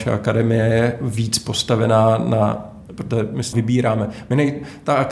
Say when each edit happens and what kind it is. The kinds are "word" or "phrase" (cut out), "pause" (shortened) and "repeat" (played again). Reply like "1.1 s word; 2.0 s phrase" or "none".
2.9 s pause; 3.5 s word